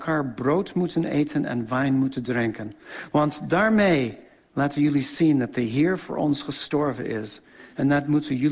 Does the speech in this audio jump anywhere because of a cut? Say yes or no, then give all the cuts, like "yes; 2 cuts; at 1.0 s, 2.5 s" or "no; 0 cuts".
no; 0 cuts